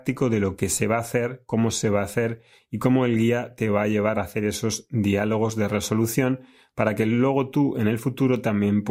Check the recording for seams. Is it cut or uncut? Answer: uncut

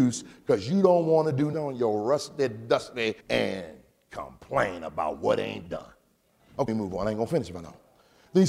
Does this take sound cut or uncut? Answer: cut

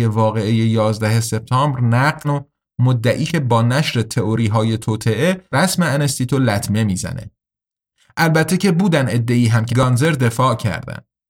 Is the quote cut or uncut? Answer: cut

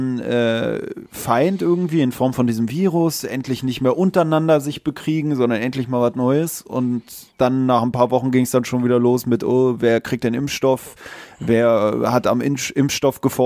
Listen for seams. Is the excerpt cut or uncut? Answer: cut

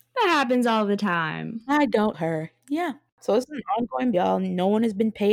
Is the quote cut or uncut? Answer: cut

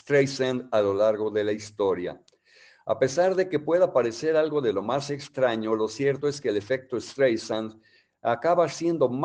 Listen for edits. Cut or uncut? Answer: uncut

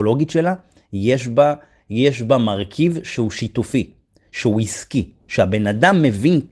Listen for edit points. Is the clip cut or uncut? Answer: uncut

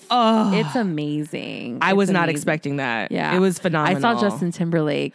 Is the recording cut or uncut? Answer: uncut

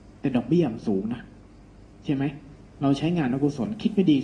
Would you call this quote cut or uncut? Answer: cut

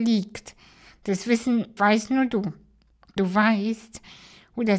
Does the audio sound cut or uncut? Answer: cut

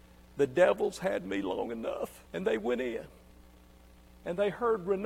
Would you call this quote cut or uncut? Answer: cut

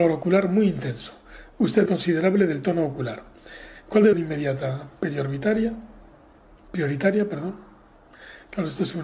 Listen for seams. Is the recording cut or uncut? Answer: cut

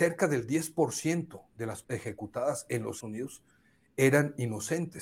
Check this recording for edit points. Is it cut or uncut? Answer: cut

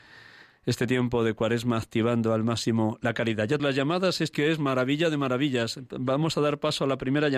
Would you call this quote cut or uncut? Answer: cut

